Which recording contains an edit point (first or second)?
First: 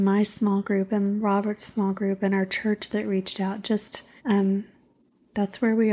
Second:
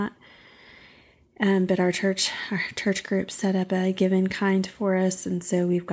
first